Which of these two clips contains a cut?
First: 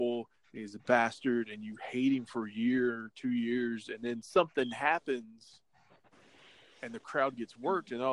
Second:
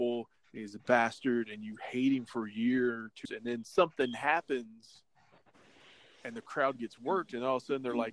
second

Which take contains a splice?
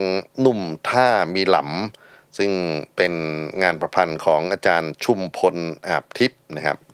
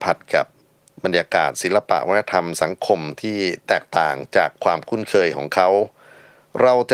second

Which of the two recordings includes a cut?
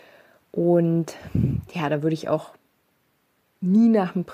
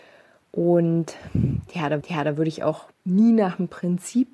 second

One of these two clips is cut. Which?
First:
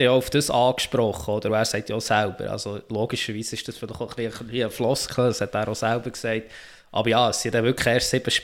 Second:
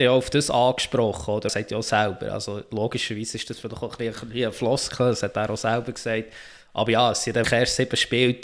second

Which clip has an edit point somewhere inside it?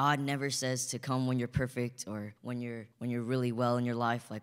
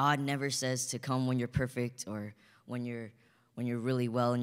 first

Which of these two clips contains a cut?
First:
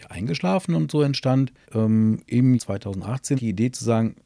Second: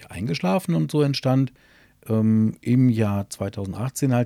first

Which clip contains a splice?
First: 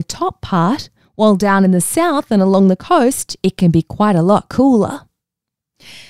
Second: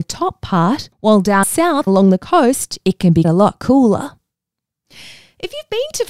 second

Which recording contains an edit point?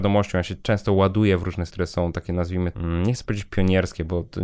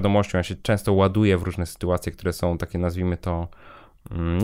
first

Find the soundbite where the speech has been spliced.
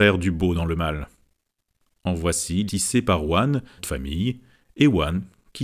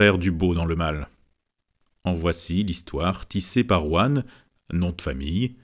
first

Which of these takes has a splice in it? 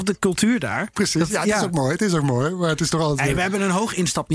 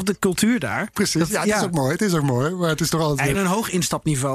second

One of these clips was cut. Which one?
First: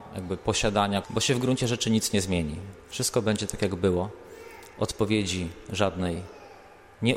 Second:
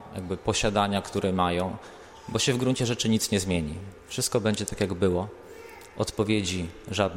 first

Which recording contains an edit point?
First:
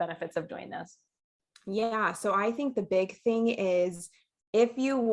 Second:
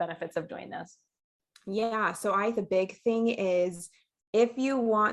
second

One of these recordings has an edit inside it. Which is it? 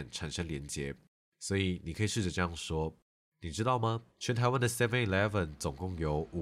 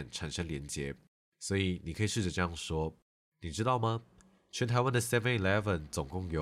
first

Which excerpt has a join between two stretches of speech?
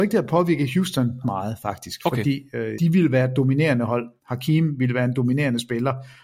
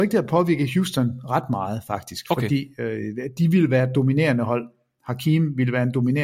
first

